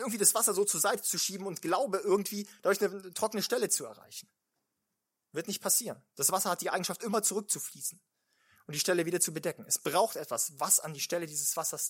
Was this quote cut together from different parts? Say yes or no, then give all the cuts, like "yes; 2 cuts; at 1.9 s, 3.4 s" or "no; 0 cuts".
no; 0 cuts